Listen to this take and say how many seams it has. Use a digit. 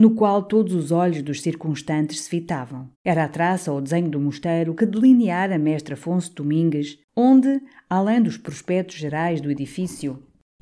2